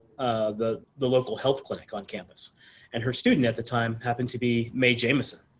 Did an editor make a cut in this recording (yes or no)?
no